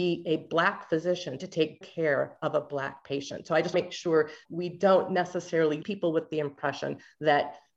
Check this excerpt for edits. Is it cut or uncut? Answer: cut